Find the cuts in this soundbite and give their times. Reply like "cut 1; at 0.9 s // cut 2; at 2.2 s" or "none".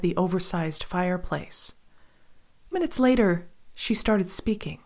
cut 1; at 2.7 s

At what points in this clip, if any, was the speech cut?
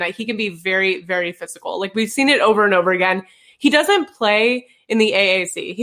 none

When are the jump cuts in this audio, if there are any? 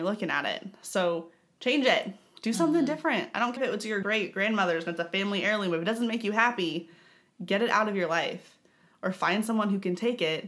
cut 1; at 3.6 s // cut 2; at 4.0 s

